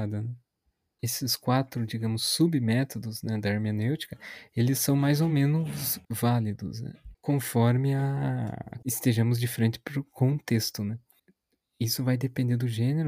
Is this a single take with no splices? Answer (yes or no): yes